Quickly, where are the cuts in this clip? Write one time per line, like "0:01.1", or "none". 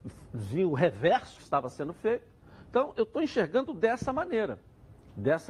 0:01.4